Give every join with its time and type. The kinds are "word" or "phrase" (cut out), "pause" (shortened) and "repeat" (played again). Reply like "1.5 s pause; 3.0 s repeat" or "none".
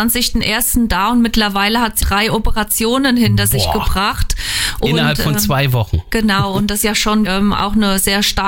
2.0 s word; 6.8 s word; 7.3 s word